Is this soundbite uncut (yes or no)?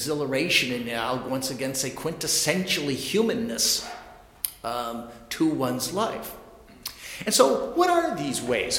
yes